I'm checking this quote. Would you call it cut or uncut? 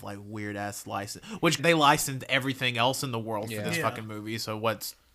cut